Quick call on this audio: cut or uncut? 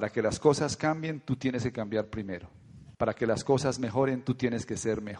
cut